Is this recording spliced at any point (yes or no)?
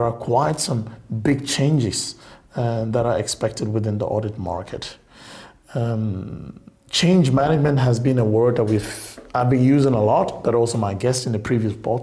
no